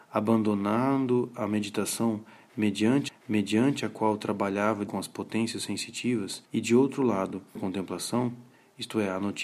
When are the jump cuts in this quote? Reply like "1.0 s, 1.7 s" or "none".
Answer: 3.1 s, 4.9 s, 6.5 s, 7.6 s